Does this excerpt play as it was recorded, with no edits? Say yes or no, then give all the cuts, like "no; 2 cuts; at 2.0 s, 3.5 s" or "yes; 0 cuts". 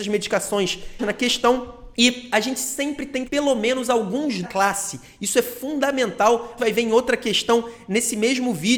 no; 5 cuts; at 1.0 s, 1.9 s, 3.2 s, 4.4 s, 6.6 s